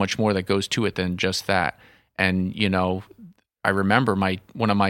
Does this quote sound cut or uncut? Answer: uncut